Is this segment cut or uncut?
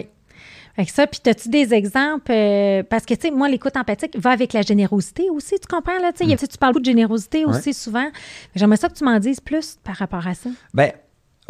cut